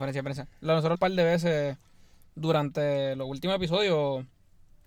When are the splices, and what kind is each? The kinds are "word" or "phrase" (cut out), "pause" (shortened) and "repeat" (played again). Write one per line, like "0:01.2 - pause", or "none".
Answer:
0:00.9 - phrase